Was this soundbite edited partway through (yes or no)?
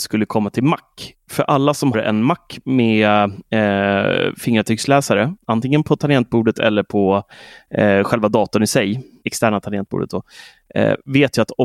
yes